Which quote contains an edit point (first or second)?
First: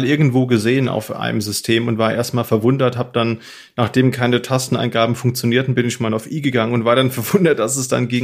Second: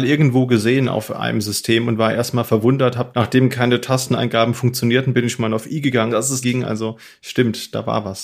second